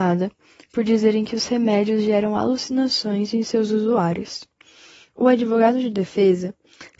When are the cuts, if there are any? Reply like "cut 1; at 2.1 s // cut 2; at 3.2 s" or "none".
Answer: none